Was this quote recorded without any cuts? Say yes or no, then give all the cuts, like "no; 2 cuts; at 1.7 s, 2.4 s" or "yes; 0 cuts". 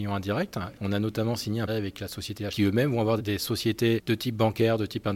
no; 3 cuts; at 1.7 s, 2.5 s, 3.2 s